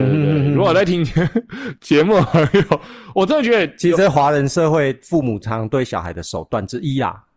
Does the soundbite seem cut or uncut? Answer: uncut